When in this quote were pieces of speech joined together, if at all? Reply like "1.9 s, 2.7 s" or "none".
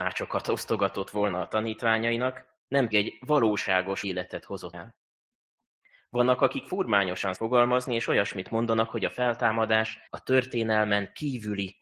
2.9 s, 4.0 s, 4.7 s, 7.3 s, 10.1 s